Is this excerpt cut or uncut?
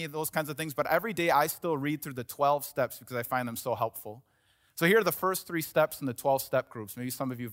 uncut